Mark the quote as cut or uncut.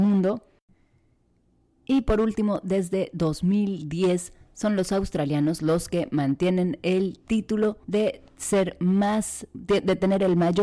cut